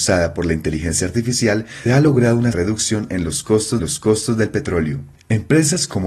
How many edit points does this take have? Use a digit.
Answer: 3